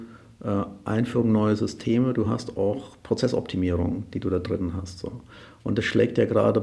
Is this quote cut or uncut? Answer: uncut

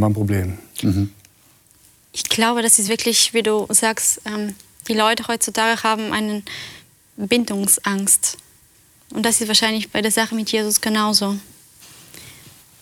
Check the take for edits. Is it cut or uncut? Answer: uncut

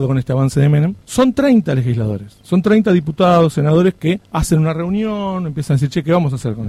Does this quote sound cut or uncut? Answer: cut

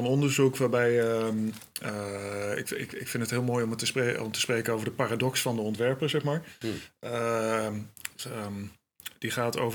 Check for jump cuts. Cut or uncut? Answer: uncut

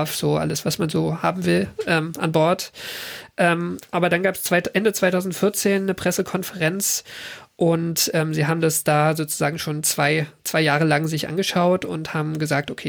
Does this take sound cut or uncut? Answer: uncut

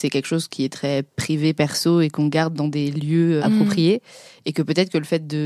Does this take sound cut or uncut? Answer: cut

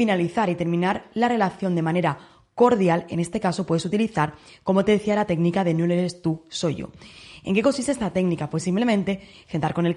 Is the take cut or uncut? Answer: uncut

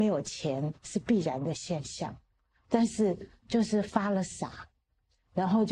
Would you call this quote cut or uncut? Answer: cut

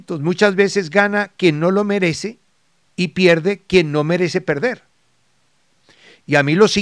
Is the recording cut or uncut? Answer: uncut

